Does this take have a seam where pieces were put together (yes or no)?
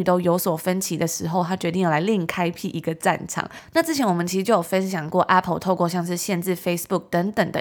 no